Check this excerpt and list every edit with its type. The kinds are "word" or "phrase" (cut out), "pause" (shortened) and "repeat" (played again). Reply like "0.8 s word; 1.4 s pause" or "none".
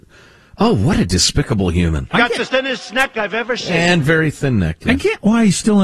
2.5 s word